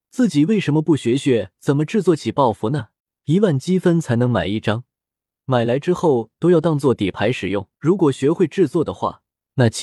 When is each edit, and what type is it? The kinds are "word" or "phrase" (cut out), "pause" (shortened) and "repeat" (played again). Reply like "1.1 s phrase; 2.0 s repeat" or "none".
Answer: 3.0 s pause; 7.7 s pause